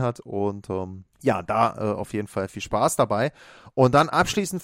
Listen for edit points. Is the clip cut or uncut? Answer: cut